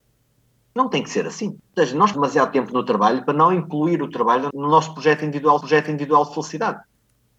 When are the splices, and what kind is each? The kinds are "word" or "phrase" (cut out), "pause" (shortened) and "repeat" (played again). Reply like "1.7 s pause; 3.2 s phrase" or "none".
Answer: 1.7 s pause; 2.1 s word; 4.5 s word; 5.6 s repeat